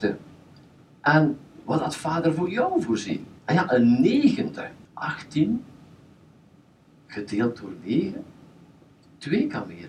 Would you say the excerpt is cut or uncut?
cut